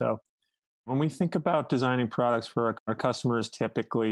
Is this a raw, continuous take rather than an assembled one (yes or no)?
no